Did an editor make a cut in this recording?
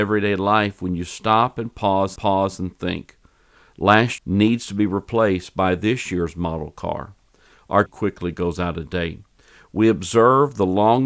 yes; 3 cuts; at 2.2 s, 4.2 s, 7.9 s

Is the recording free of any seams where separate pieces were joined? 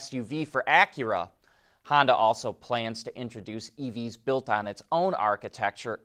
yes; 0 cuts

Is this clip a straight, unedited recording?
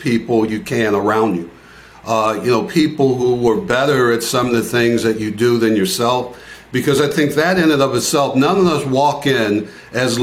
yes; 0 cuts

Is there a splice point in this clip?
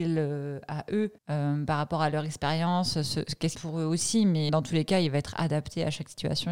yes; 3 cuts; at 1.2 s, 3.5 s, 4.5 s

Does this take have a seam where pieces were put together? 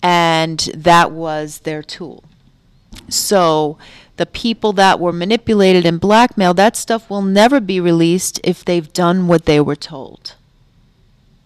no; 0 cuts

